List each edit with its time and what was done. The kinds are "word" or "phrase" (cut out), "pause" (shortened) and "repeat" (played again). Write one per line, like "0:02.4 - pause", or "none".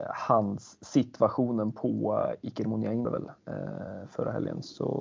0:03.0 - word